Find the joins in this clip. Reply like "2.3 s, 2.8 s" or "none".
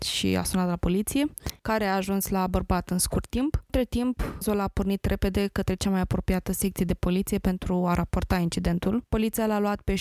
none